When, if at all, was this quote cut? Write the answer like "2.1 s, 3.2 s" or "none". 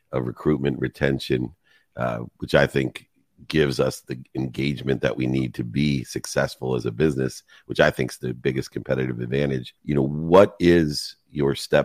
9.8 s